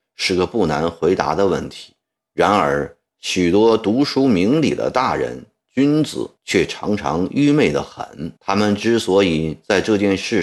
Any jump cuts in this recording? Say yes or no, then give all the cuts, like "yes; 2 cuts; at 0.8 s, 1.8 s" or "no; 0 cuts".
yes; 3 cuts; at 2.0 s, 6.4 s, 8.4 s